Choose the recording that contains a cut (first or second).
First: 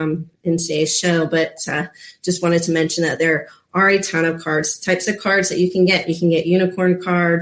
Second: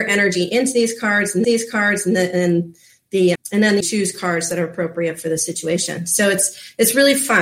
second